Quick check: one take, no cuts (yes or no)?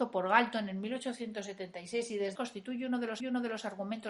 no